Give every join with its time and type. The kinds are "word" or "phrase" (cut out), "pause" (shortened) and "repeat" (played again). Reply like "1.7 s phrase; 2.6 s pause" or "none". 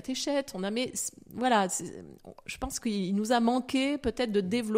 none